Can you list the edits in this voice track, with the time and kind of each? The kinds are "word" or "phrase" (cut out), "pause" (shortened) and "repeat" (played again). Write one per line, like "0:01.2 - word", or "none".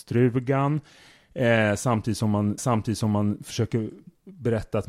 0:02.6 - repeat